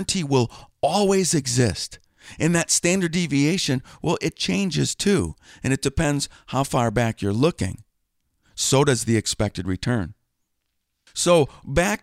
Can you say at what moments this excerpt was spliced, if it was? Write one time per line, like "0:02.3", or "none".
none